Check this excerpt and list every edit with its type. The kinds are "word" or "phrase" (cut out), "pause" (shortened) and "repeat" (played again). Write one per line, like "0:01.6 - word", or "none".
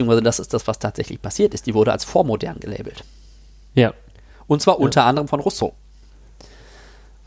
none